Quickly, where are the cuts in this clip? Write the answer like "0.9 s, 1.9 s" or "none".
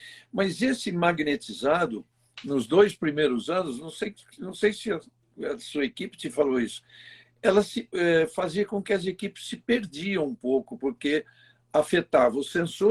none